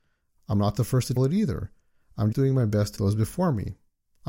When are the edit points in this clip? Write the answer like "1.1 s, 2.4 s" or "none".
1.2 s, 2.3 s, 3.0 s